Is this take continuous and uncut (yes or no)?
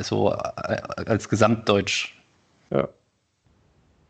yes